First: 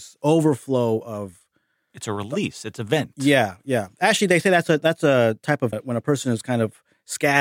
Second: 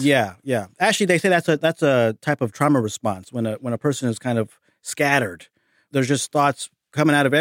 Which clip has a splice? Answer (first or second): first